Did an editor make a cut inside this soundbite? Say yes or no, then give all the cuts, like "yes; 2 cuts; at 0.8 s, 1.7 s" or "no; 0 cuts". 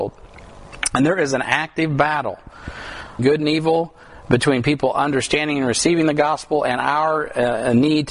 yes; 1 cut; at 3.2 s